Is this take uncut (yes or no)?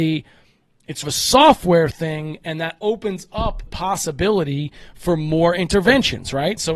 no